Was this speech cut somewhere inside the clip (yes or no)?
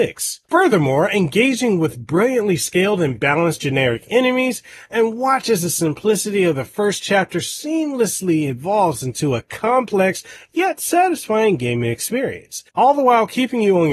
no